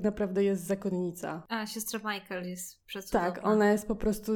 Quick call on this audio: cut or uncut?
uncut